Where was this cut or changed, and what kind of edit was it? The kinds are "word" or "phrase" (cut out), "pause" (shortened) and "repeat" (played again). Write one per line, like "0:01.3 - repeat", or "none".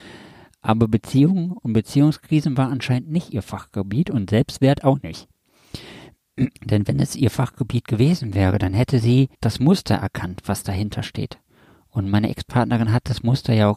0:06.6 - pause
0:09.3 - pause